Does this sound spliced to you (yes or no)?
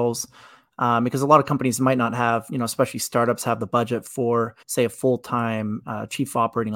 yes